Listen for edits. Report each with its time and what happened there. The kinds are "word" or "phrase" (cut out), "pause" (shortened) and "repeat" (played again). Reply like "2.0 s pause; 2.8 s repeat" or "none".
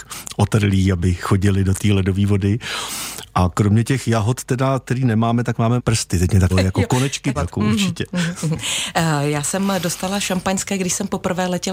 5.8 s word; 6.5 s word; 7.3 s phrase